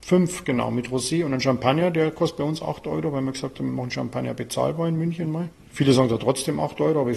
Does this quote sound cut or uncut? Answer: cut